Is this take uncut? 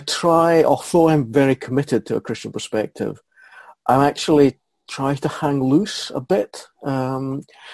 yes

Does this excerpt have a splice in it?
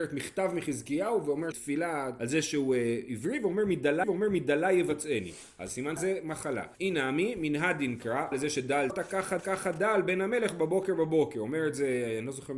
yes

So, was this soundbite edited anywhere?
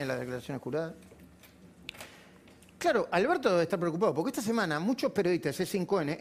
no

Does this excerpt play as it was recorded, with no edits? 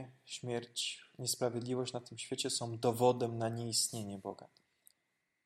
yes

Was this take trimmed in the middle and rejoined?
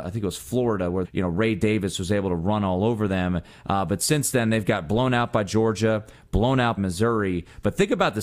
yes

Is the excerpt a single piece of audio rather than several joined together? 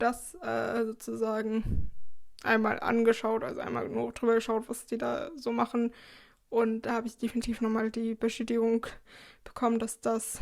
no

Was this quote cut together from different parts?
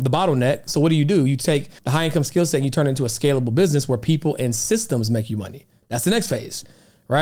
yes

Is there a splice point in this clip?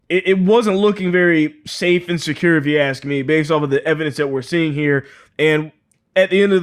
no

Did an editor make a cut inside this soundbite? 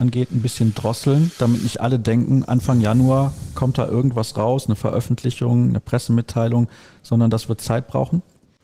no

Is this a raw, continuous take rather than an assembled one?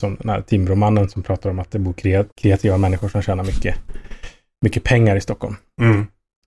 no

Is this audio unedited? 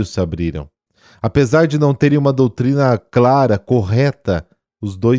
yes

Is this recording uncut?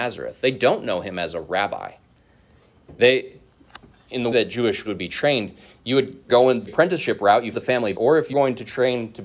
no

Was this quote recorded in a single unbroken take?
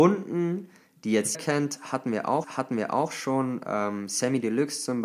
no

